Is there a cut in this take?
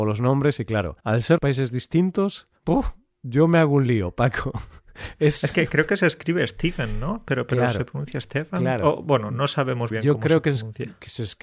yes; 4 cuts; at 1.0 s, 1.4 s, 2.6 s, 9.9 s

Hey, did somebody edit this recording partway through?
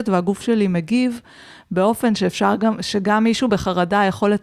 no; 0 cuts

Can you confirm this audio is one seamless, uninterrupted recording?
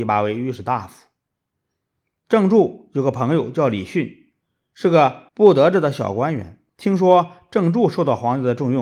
no; 2 cuts; at 5.3 s, 6.7 s

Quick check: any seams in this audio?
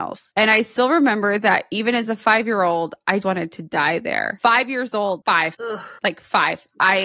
yes; 1 cut; at 3.2 s

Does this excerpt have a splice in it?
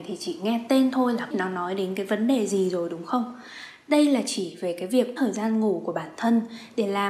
yes; 2 cuts; at 1.3 s, 5.2 s

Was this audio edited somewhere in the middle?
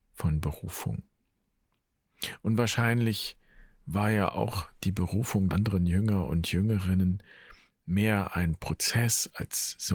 yes; 1 cut; at 5.5 s

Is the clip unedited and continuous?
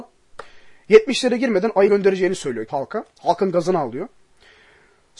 no; 2 cuts; at 1.9 s, 2.7 s

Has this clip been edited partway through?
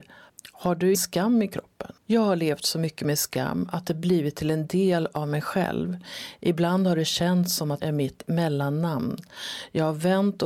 yes; 3 cuts; at 0.9 s, 2.0 s, 7.8 s

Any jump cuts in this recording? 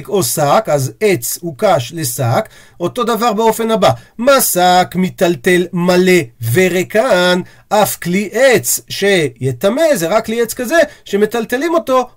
no; 0 cuts

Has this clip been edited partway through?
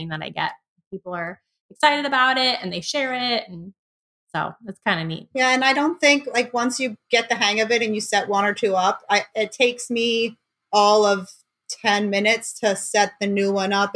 no; 0 cuts

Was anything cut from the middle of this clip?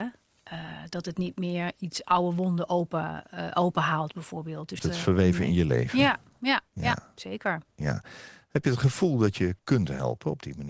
yes; 4 cuts; at 1.7 s, 4.8 s, 6.7 s, 9.6 s

